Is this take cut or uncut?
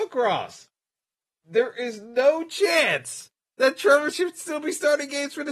cut